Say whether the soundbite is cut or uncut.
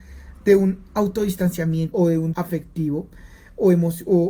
cut